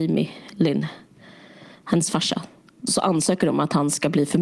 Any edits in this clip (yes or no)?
no